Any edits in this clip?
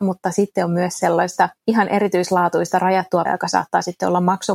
yes; 2 cuts; at 1.6 s, 3.3 s

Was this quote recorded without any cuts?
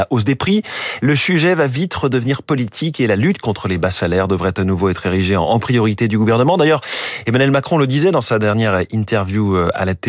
yes; 0 cuts

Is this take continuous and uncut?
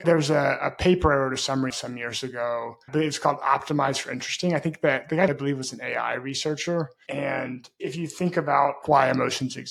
no; 2 cuts; at 1.7 s, 5.3 s

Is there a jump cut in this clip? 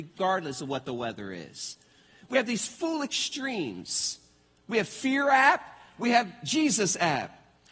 no; 0 cuts

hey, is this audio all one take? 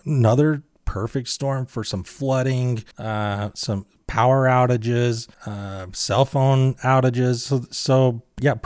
no; 2 cuts; at 2.9 s, 5.3 s

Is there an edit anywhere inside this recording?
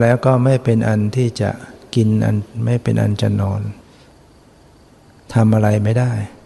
no; 0 cuts

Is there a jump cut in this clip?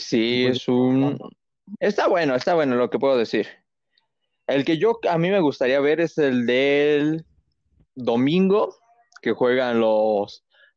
no; 0 cuts

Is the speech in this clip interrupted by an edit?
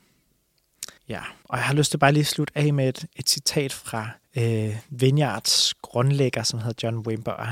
yes; 3 cuts; at 1.0 s, 1.4 s, 4.2 s

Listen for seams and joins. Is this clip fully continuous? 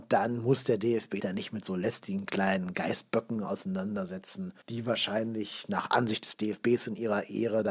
no; 2 cuts; at 1.2 s, 4.6 s

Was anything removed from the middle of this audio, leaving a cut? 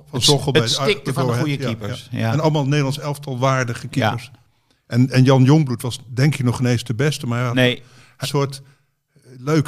yes; 1 cut; at 8.2 s

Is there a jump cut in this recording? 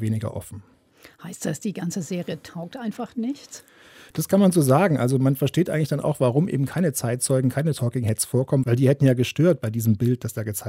no; 0 cuts

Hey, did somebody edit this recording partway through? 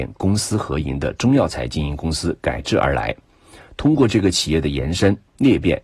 no; 0 cuts

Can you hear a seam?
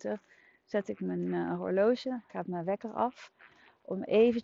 yes; 1 cut; at 2.3 s

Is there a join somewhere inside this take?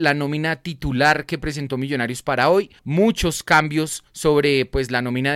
yes; 2 cuts; at 2.8 s, 4.1 s

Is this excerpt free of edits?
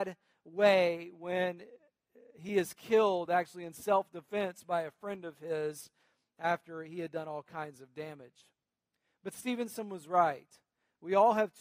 yes; 0 cuts

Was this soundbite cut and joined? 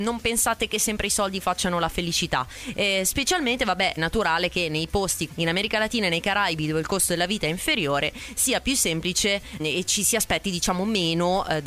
yes; 3 cuts; at 4.0 s, 5.3 s, 9.6 s

